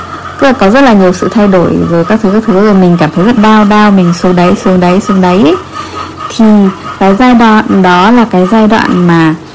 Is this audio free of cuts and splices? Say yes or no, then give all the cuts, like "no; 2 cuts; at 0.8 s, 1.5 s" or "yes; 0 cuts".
no; 1 cut; at 3.4 s